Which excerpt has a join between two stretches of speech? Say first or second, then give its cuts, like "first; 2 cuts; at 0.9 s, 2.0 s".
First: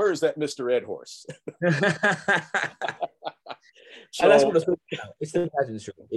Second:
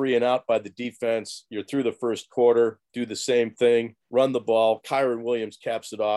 second; 2 cuts; at 2.8 s, 4.0 s